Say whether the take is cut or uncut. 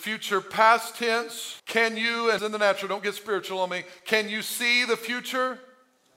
cut